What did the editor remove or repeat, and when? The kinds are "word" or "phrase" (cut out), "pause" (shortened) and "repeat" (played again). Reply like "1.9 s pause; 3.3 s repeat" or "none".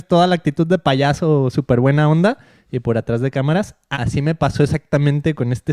3.9 s word